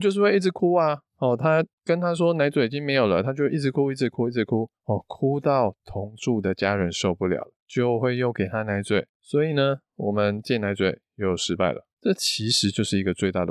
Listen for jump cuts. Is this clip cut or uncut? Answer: cut